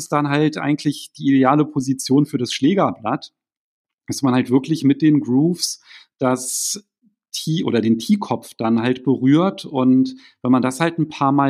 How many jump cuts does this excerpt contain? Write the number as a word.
zero